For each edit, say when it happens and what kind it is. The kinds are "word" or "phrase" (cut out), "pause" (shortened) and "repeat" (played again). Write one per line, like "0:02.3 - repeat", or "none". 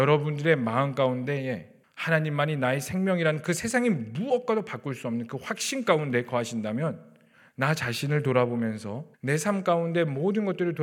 0:01.8 - pause
0:07.3 - pause
0:09.1 - pause